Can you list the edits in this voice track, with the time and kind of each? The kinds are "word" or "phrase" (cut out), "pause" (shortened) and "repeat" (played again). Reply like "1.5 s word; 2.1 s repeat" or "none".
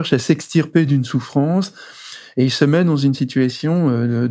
none